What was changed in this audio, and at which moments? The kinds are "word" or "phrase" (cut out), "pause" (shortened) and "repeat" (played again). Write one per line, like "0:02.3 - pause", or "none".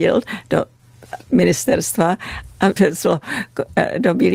0:01.2 - word
0:02.8 - word